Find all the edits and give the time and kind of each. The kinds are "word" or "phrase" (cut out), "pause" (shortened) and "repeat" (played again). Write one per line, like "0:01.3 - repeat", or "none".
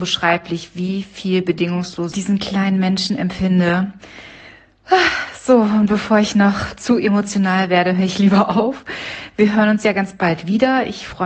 0:02.1 - phrase